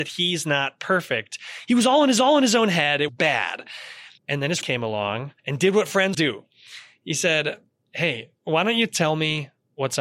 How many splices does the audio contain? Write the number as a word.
seven